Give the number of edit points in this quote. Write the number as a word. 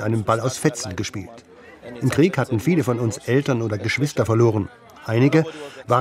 zero